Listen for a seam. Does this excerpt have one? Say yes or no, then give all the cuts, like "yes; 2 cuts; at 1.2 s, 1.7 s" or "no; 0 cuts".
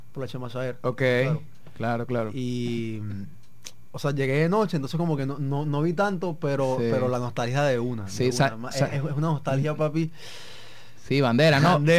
no; 0 cuts